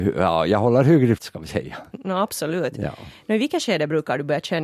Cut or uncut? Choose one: cut